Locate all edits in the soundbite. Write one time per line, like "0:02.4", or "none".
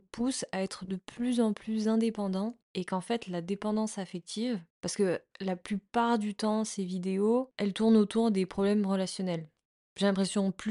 none